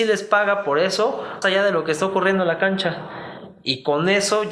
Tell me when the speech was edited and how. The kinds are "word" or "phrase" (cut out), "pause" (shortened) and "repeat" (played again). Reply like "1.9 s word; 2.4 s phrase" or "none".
1.4 s word

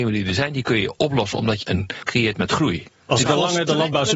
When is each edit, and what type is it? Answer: 1.6 s word; 2.1 s word; 3.3 s word

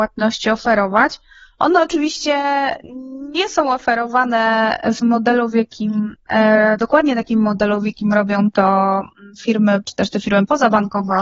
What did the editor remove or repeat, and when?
5.0 s word; 9.8 s word

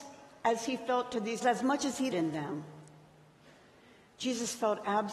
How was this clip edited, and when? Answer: 1.4 s word; 2.1 s word

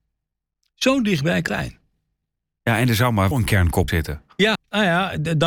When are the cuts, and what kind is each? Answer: 1.5 s word; 3.3 s word; 3.9 s word; 4.5 s word

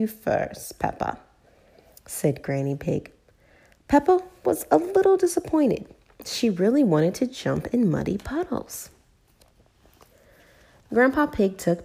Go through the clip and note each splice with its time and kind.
none

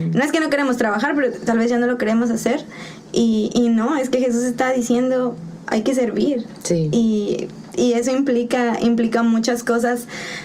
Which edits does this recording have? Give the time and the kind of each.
none

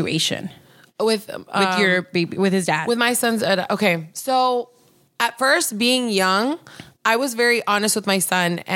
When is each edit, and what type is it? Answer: none

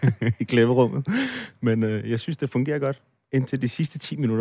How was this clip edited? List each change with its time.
none

